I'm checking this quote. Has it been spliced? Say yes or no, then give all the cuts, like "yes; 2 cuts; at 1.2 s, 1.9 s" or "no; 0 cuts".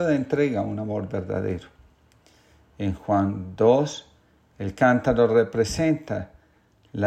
no; 0 cuts